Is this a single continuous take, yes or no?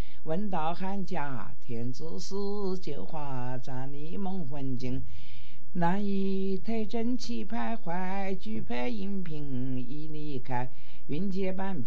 yes